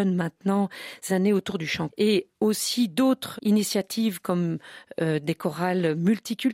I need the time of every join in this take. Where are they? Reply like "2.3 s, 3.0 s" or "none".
1.1 s, 1.9 s, 3.4 s